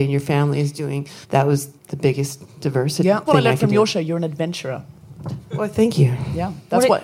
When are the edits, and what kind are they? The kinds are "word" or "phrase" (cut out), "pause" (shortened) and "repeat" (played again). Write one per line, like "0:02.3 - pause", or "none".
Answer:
0:01.2 - pause
0:01.8 - pause
0:03.3 - word